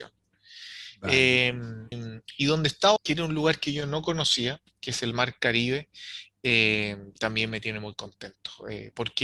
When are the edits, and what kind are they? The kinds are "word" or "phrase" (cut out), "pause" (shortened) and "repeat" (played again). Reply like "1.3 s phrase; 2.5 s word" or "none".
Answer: 1.9 s word; 3.0 s word